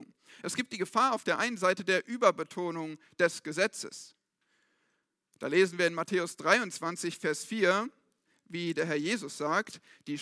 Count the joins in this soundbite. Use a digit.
0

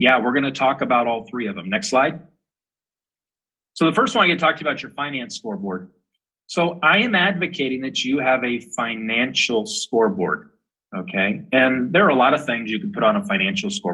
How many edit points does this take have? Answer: 0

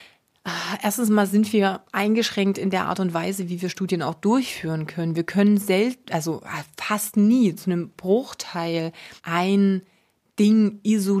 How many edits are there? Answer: 1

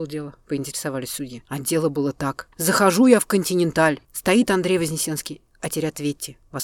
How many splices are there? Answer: 3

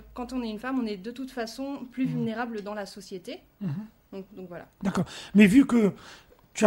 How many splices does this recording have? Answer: 2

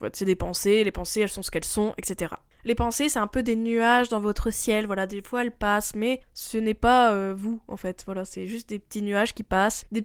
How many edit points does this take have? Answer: 0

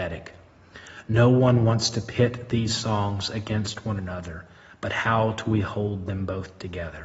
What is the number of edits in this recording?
0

